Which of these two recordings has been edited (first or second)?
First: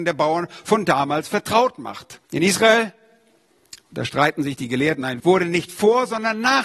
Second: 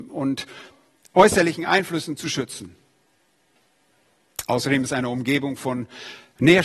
first